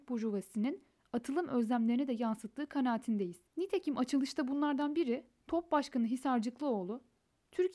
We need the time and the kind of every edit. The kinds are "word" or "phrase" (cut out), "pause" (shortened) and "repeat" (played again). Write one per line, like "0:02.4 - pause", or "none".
0:03.5 - pause